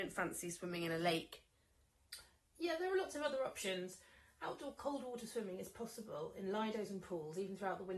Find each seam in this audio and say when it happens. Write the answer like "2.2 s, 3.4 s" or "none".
none